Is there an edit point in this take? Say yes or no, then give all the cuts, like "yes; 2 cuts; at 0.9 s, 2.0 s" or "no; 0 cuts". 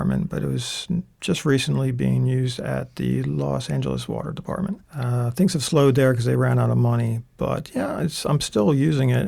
yes; 1 cut; at 4.8 s